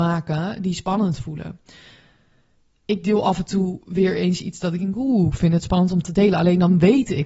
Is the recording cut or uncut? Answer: uncut